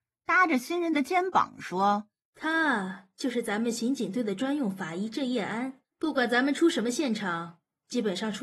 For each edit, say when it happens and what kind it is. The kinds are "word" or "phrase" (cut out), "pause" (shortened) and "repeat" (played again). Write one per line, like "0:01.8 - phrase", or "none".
0:05.8 - pause